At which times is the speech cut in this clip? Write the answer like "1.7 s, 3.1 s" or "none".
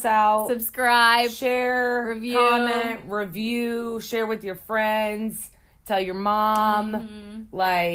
none

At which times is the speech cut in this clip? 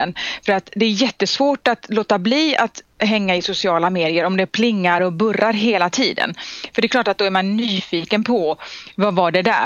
none

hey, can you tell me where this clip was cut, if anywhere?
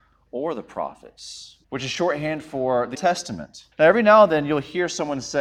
1.6 s, 2.9 s, 3.7 s

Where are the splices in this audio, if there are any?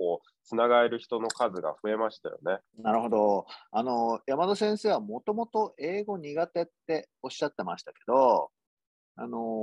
2.7 s, 3.7 s

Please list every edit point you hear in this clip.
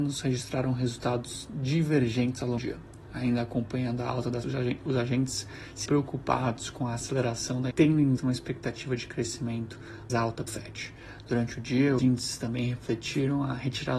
2.6 s, 4.4 s, 5.9 s, 7.7 s, 8.2 s, 10.1 s, 10.5 s, 12.0 s

